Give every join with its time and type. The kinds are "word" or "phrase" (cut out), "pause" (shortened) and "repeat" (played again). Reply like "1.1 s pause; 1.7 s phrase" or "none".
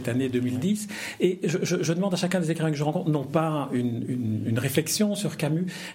none